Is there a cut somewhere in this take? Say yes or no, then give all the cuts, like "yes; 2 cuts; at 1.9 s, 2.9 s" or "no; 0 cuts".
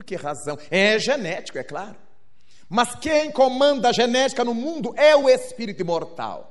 no; 0 cuts